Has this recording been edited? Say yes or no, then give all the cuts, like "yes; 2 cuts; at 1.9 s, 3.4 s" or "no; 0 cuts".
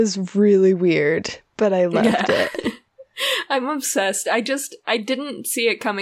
no; 0 cuts